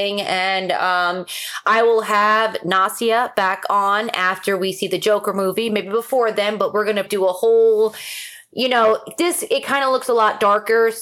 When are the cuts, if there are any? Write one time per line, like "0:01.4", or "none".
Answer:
0:07.1